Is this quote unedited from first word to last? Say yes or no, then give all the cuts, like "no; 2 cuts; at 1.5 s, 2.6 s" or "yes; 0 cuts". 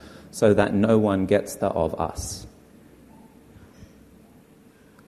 no; 1 cut; at 1.6 s